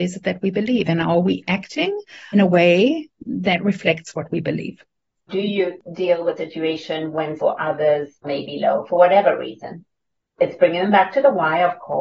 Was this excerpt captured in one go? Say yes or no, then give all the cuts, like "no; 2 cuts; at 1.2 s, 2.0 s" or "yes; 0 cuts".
no; 6 cuts; at 2.3 s, 5.3 s, 6.4 s, 7.4 s, 8.2 s, 10.4 s